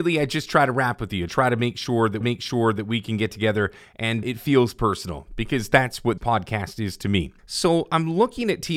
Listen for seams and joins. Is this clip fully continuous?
no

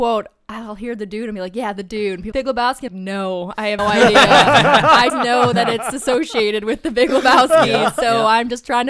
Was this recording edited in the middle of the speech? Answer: yes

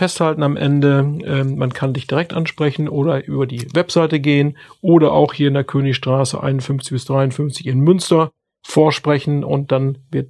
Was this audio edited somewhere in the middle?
no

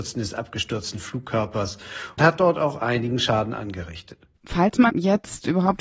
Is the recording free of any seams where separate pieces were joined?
no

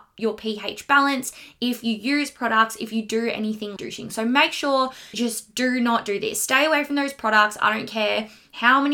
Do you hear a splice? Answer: yes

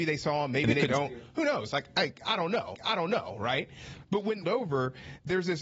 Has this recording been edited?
yes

